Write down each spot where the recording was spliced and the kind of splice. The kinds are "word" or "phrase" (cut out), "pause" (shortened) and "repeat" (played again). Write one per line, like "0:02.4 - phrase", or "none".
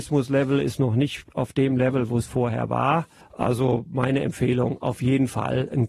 0:03.2 - pause